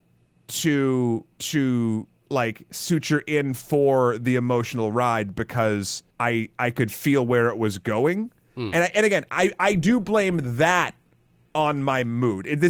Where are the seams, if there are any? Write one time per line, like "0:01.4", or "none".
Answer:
0:01.3
0:06.1